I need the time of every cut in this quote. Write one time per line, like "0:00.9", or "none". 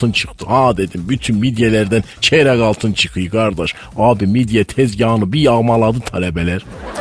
none